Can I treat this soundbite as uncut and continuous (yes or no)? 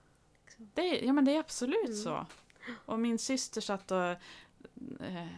yes